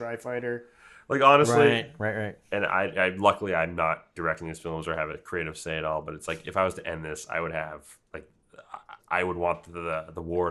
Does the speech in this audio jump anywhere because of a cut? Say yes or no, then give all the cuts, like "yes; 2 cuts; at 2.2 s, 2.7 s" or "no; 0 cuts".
yes; 1 cut; at 9.0 s